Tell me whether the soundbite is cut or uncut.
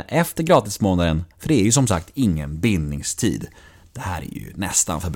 uncut